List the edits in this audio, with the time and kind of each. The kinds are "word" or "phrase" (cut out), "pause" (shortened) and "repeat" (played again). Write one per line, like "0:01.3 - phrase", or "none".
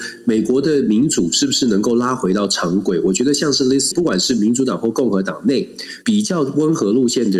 0:03.9 - word
0:06.0 - pause

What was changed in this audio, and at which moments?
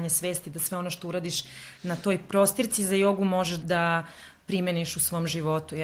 0:03.6 - word

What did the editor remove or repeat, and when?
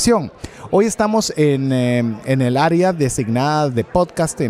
none

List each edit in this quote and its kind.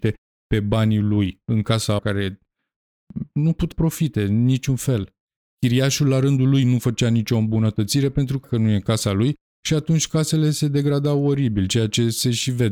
0:02.0 - word
0:03.7 - word
0:08.4 - word

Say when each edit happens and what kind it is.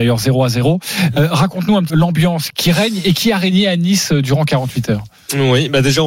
0:01.9 - word
0:02.5 - word

